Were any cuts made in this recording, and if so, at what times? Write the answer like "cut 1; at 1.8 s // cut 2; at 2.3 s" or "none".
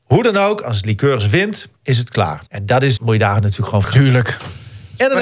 cut 1; at 1.8 s // cut 2; at 2.5 s // cut 3; at 3.0 s // cut 4; at 3.8 s